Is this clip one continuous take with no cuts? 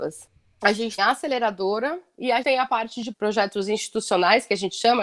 no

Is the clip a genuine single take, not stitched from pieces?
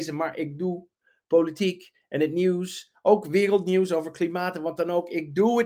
yes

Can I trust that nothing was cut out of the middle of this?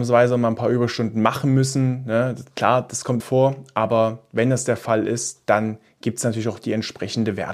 no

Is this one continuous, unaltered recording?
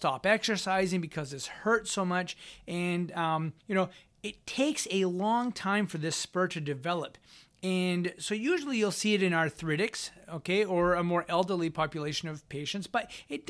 no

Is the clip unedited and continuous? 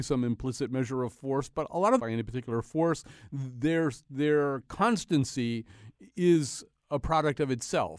no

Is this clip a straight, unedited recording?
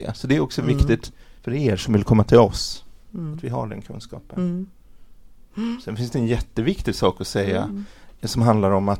no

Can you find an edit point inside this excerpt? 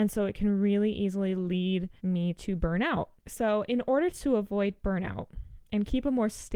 yes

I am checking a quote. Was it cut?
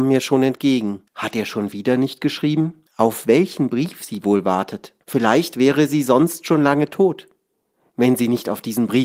yes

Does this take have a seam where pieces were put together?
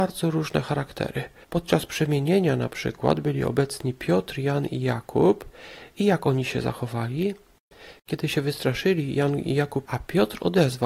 yes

